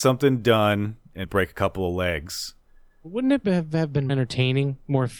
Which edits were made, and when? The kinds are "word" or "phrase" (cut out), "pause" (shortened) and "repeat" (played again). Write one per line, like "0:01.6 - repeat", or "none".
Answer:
0:01.2 - word
0:03.4 - word
0:04.1 - word